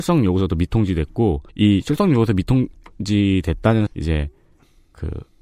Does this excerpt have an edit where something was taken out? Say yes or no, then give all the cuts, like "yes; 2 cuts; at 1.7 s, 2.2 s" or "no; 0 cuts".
yes; 2 cuts; at 1.5 s, 3.9 s